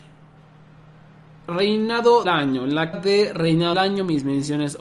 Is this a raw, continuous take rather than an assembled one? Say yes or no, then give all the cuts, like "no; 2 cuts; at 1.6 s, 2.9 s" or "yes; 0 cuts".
no; 3 cuts; at 2.2 s, 2.9 s, 3.7 s